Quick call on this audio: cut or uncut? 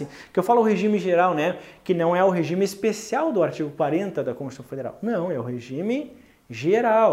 uncut